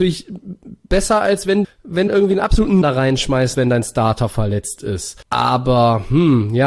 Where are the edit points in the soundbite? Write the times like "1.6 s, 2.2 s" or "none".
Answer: 1.6 s, 2.1 s, 2.8 s, 3.5 s, 5.2 s